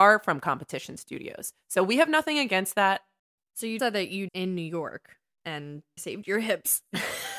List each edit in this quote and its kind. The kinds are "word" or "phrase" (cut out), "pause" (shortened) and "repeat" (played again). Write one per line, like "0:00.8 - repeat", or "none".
0:03.8 - word
0:04.3 - word
0:06.0 - word